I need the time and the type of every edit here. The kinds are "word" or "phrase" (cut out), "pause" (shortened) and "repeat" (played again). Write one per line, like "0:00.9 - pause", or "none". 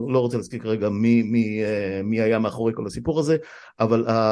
none